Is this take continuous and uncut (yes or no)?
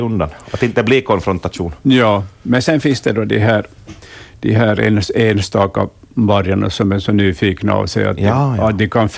yes